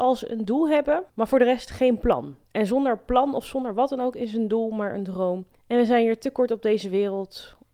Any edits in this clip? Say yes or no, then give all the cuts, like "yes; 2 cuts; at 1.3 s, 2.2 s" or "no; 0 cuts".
yes; 3 cuts; at 1.1 s, 2.4 s, 5.5 s